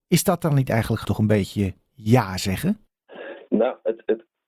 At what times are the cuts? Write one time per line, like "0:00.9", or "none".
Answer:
0:01.0